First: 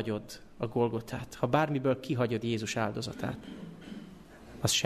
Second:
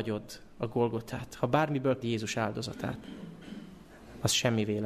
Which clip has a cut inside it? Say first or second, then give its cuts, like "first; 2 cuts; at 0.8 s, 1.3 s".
second; 1 cut; at 2.0 s